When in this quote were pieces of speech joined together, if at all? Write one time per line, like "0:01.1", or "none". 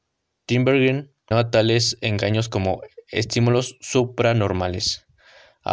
0:01.3